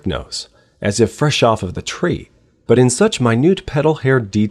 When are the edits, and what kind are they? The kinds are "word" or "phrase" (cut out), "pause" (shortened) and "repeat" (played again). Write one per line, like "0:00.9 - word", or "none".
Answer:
none